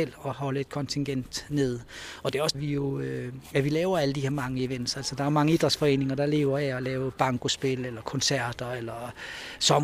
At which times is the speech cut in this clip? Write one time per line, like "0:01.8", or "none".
0:02.5